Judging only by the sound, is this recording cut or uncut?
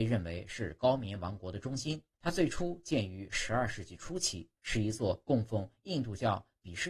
cut